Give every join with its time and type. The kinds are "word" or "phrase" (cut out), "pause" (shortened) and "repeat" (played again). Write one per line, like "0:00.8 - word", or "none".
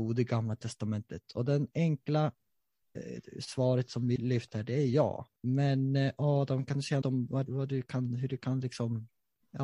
0:04.2 - word
0:05.4 - pause
0:07.0 - word
0:07.5 - word